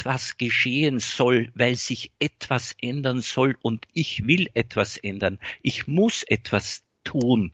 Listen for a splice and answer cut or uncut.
uncut